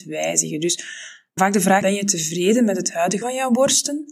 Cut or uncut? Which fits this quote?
cut